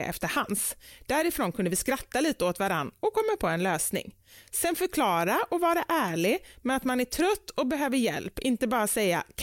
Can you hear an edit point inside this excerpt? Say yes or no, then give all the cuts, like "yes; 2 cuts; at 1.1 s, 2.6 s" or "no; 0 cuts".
no; 0 cuts